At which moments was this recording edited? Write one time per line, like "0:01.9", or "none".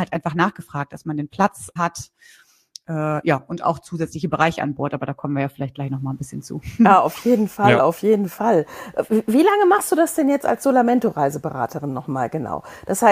0:01.8